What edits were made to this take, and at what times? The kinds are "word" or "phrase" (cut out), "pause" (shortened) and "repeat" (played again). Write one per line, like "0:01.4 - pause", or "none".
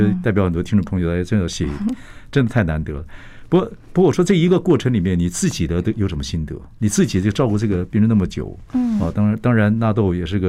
0:03.8 - pause